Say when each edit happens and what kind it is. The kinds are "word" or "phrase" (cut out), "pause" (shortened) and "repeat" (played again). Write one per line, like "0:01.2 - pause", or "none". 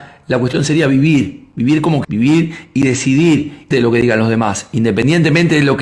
0:02.0 - word
0:03.7 - word